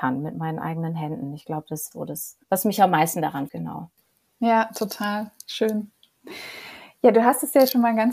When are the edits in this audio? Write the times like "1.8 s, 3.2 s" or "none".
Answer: 1.9 s, 2.4 s, 3.5 s